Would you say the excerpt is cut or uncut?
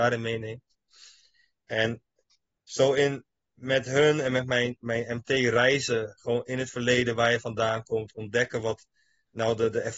uncut